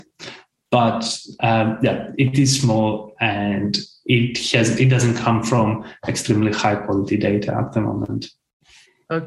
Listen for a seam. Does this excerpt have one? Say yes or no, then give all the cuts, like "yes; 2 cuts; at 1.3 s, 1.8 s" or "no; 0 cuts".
no; 0 cuts